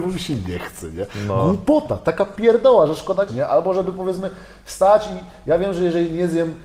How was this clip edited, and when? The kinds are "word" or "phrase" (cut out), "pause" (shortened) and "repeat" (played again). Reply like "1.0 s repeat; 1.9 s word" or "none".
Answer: 3.3 s word